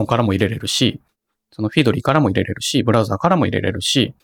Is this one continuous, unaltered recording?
yes; 0 cuts

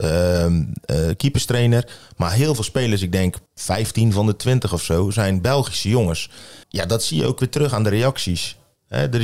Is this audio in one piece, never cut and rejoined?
no; 2 cuts; at 3.5 s, 6.6 s

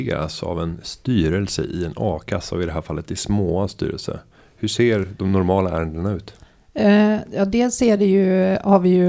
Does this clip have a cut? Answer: no; 0 cuts

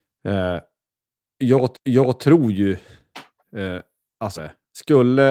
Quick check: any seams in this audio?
yes; 3 cuts; at 1.7 s, 3.4 s, 4.4 s

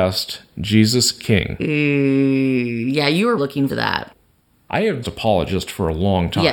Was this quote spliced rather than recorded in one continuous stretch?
yes; 4 cuts; at 1.2 s, 3.4 s, 3.7 s, 5.0 s

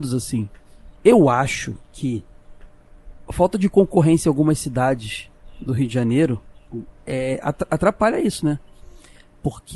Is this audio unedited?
no; 1 cut; at 1.0 s

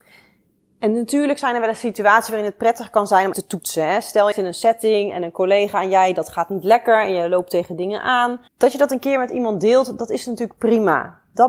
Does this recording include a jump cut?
yes; 3 cuts; at 3.3 s, 4.3 s, 8.5 s

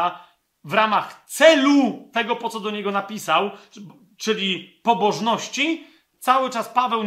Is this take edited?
no; 0 cuts

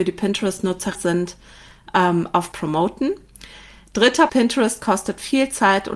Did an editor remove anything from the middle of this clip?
yes; 3 cuts; at 0.9 s, 2.5 s, 4.3 s

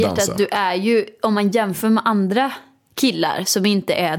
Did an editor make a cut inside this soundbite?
no; 0 cuts

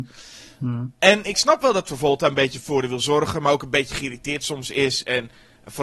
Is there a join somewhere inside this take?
no; 0 cuts

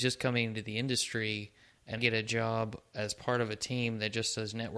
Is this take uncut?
no; 1 cut; at 2.0 s

